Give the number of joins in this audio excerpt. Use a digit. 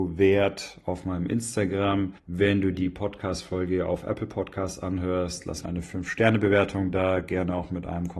3